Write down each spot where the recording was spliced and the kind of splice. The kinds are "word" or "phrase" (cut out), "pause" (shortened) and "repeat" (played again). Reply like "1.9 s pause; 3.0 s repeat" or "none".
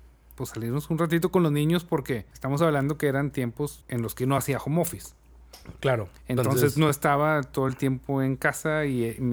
none